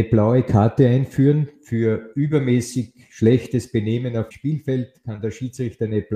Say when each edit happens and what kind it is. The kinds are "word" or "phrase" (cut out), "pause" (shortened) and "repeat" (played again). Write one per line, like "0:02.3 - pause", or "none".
0:04.3 - word